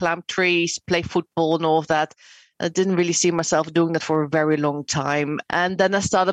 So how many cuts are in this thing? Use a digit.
0